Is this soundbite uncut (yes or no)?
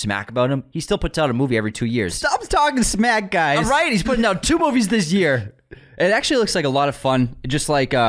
yes